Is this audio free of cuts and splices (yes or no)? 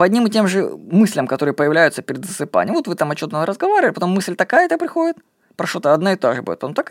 yes